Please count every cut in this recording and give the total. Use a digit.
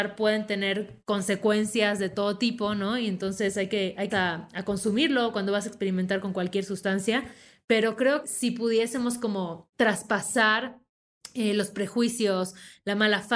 3